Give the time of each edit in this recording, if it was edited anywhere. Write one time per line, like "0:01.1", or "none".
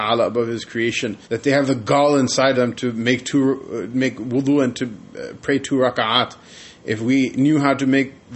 0:01.2
0:02.5